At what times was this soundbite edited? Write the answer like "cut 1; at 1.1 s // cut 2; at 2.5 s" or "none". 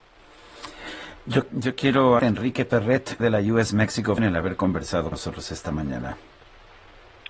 cut 1; at 1.5 s // cut 2; at 2.2 s // cut 3; at 3.2 s // cut 4; at 4.2 s // cut 5; at 5.1 s